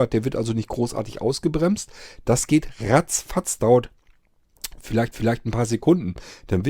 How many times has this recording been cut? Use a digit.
2